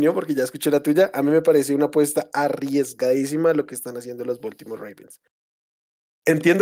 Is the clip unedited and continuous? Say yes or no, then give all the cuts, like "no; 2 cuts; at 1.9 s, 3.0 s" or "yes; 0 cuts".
yes; 0 cuts